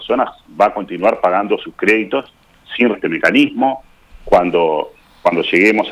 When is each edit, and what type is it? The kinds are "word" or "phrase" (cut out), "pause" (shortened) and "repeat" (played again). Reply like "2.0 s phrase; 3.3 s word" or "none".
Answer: 2.9 s word